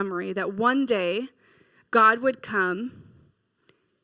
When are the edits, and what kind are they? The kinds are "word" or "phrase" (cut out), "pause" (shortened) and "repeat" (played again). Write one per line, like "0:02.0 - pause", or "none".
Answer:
none